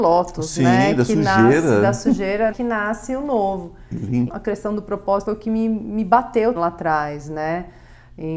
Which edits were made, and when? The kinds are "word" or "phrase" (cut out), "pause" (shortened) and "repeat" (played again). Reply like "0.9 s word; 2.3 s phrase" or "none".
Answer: 2.5 s word; 4.3 s word; 5.3 s word; 6.6 s word